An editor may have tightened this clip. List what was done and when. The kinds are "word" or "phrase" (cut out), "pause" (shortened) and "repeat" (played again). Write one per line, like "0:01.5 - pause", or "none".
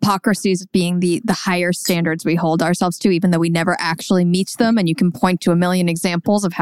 none